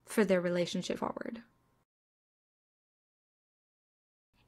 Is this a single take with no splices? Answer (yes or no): no